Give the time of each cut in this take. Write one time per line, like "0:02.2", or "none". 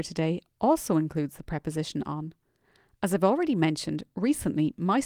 none